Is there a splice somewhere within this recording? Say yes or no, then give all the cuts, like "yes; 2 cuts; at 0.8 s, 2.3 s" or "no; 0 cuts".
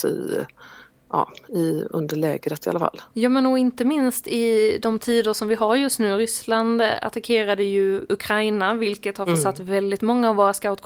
yes; 1 cut; at 3.1 s